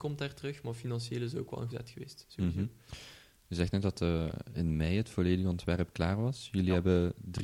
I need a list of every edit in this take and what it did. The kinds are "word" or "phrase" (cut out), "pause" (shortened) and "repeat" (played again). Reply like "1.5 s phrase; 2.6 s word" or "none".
1.7 s word